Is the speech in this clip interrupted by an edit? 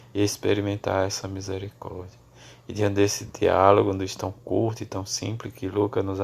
no; 0 cuts

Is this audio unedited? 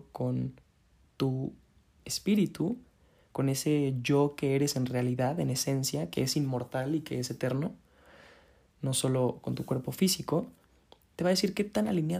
yes; 0 cuts

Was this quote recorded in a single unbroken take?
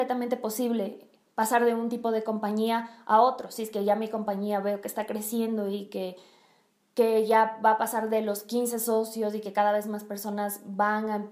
yes; 0 cuts

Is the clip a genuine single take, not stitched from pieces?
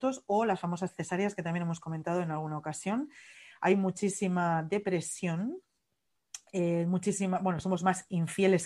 yes; 0 cuts

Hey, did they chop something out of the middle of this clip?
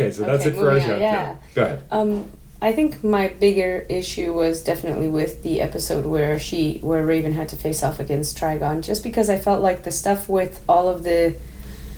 yes; 1 cut; at 1.5 s

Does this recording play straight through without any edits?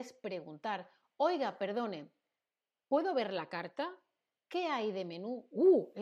yes; 0 cuts

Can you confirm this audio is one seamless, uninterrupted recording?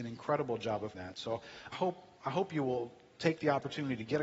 no; 2 cuts; at 0.9 s, 1.7 s

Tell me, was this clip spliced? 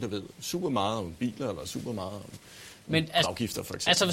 yes; 1 cut; at 3.2 s

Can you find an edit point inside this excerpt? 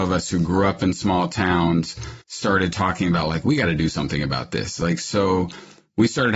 yes; 1 cut; at 2.2 s

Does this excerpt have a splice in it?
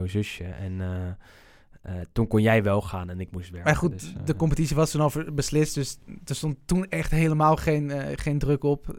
no; 0 cuts

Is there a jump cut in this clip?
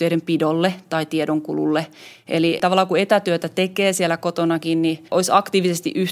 yes; 1 cut; at 5.1 s

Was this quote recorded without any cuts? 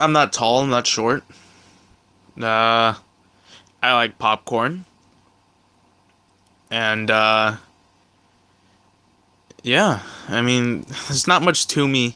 yes; 0 cuts

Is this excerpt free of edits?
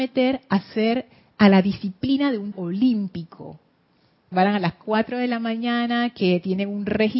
no; 2 cuts; at 2.5 s, 4.3 s

